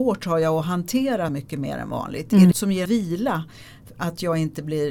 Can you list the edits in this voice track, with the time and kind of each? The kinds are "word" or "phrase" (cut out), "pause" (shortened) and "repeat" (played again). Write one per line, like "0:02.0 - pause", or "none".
0:01.3 - phrase
0:02.5 - phrase
0:02.9 - word